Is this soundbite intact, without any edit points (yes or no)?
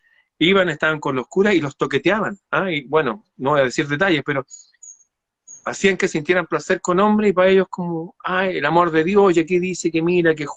yes